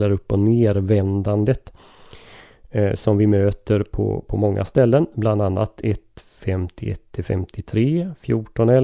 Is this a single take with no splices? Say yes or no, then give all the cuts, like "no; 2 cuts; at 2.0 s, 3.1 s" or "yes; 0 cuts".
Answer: yes; 0 cuts